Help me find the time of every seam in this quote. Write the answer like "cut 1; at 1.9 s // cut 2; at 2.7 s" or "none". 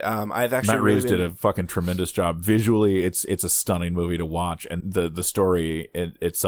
cut 1; at 4.8 s